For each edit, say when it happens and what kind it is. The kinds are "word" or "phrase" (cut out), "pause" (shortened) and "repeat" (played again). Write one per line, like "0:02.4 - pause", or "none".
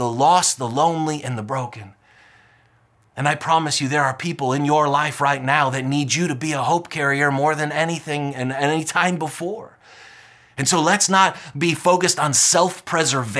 none